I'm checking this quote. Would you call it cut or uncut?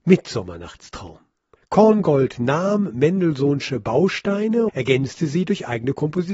cut